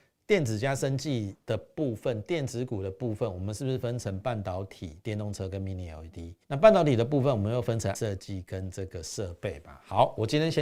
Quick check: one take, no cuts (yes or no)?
no